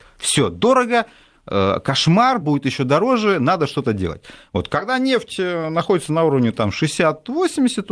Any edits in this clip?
no; 0 cuts

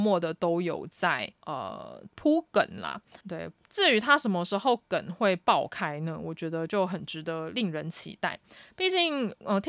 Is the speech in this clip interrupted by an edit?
yes; 2 cuts; at 1.4 s, 3.2 s

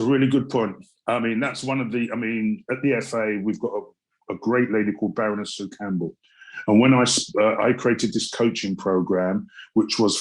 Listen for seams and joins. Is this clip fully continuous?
yes; 0 cuts

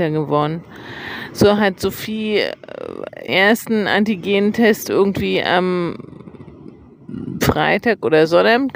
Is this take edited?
yes; 1 cut; at 3.3 s

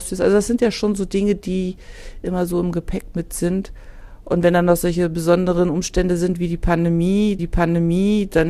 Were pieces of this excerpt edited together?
yes; 1 cut; at 7.4 s

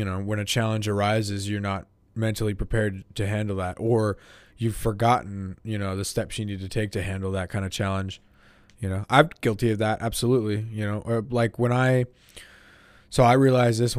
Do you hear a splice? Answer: no; 0 cuts

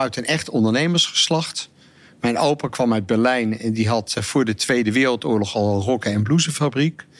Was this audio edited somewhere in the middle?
no; 0 cuts

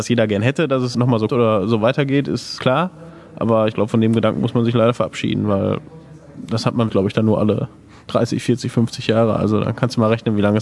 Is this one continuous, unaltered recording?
no; 2 cuts; at 1.3 s, 6.9 s

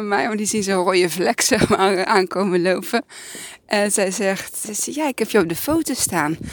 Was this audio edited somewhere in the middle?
yes; 1 cut; at 4.6 s

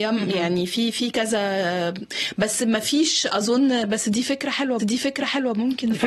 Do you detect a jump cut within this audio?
yes; 1 cut; at 4.8 s

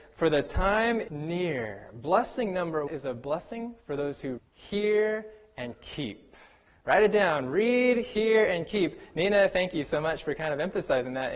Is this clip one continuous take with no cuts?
no; 4 cuts; at 1.1 s, 2.9 s, 4.4 s, 6.7 s

